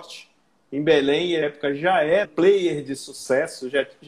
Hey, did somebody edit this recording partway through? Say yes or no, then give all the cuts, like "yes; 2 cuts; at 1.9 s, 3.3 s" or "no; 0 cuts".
yes; 2 cuts; at 1.4 s, 2.2 s